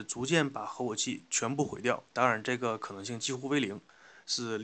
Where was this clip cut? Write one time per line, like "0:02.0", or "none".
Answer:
0:02.1